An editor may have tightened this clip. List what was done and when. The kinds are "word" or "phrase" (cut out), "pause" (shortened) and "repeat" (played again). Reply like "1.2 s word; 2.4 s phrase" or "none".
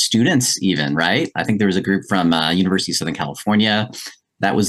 none